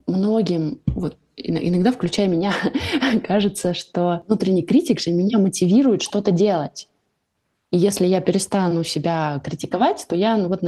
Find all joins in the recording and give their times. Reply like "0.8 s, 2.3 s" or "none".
none